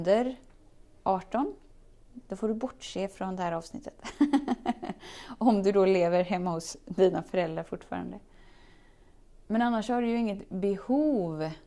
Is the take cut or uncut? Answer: uncut